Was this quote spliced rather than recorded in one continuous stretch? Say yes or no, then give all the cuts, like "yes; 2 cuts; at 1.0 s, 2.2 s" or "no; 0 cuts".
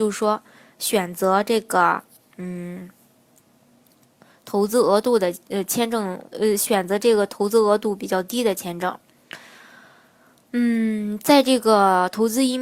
no; 0 cuts